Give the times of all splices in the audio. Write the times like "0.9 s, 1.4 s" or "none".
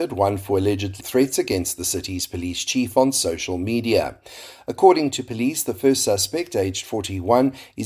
1.0 s